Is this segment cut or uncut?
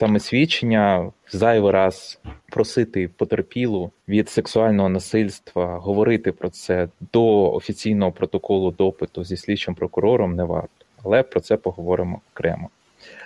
uncut